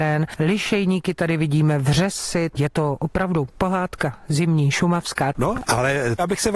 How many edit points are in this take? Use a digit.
0